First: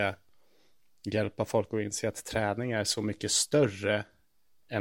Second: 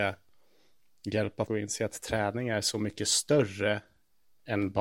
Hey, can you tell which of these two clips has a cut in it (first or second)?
second